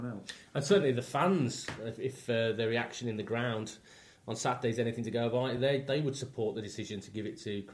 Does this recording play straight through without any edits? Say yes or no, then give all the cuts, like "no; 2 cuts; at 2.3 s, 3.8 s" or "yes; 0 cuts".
yes; 0 cuts